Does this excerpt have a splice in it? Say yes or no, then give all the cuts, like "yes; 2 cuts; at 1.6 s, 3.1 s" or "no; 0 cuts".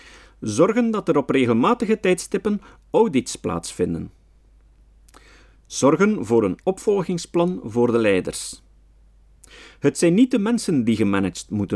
no; 0 cuts